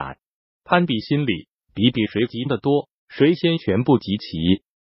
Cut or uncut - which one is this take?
uncut